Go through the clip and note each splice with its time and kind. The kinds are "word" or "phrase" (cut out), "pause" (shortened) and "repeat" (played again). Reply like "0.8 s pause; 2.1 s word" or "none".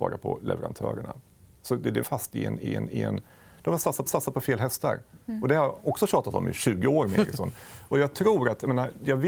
2.0 s word; 2.6 s repeat; 4.1 s repeat